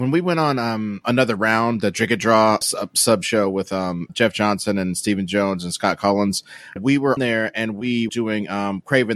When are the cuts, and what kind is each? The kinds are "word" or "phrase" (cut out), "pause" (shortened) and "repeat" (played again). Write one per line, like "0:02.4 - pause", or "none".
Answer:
0:01.0 - word
0:02.6 - word
0:04.1 - word
0:06.8 - word
0:07.2 - word
0:08.1 - word